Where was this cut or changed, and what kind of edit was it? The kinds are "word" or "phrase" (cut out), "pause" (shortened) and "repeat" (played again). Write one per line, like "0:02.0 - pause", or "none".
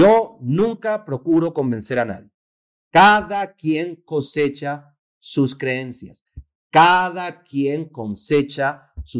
none